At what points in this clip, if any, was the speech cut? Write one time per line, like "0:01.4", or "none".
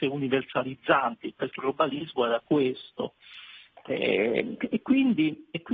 0:01.6
0:04.6